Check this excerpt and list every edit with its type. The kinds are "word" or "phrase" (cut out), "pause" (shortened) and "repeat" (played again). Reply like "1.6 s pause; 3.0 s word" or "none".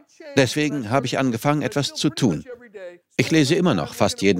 3.0 s pause